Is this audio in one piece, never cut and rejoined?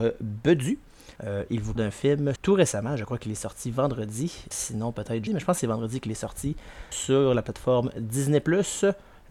no; 6 cuts; at 1.2 s, 1.8 s, 2.4 s, 4.5 s, 5.3 s, 6.9 s

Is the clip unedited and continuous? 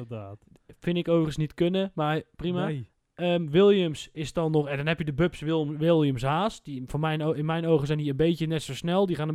yes; 0 cuts

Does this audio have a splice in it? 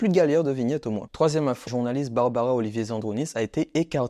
yes; 1 cut; at 1.7 s

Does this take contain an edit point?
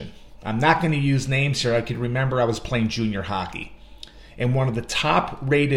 no; 0 cuts

